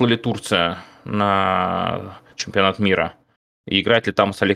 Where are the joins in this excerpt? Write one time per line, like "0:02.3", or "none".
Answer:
none